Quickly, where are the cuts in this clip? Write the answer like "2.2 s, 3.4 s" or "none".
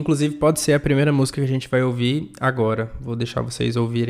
none